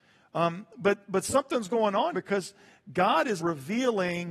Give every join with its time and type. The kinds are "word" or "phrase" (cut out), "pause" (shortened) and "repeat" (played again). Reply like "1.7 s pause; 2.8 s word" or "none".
2.1 s word; 3.4 s word